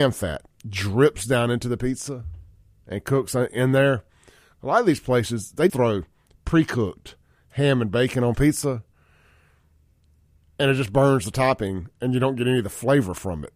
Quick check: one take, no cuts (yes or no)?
no